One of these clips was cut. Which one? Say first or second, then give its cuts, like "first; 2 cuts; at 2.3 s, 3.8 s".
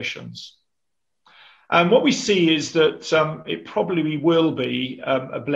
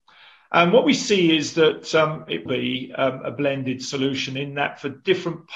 second; 1 cut; at 2.5 s